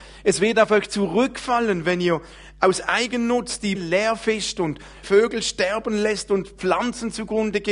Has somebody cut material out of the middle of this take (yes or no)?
yes